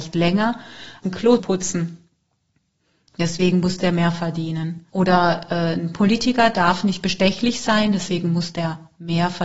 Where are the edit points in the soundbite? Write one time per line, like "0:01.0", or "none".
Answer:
0:01.0
0:01.4
0:04.9